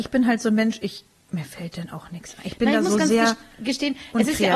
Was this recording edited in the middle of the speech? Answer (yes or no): no